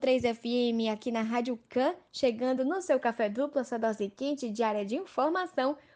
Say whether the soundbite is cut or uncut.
uncut